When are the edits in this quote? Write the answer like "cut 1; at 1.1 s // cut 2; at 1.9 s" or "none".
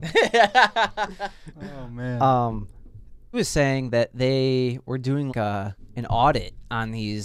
cut 1; at 3.3 s // cut 2; at 5.3 s

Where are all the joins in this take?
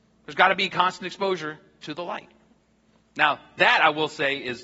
none

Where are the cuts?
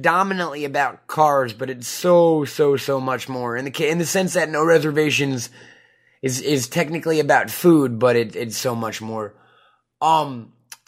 none

